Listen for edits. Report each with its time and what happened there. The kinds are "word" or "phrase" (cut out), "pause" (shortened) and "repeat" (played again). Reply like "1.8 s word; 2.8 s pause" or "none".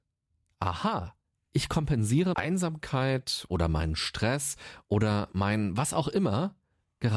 2.3 s word